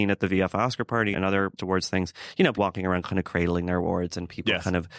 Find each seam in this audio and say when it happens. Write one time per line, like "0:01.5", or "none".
0:01.1
0:01.6
0:02.5

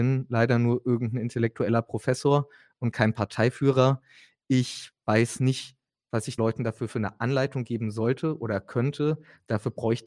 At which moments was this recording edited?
0:06.4

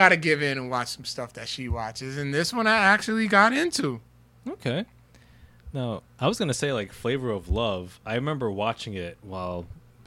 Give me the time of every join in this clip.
none

